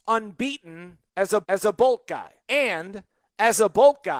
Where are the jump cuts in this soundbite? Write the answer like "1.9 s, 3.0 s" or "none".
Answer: 1.4 s, 2.4 s